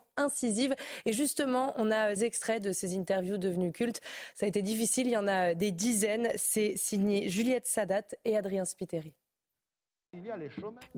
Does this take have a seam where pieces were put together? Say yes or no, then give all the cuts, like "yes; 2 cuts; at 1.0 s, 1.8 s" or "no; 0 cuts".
yes; 1 cut; at 2.2 s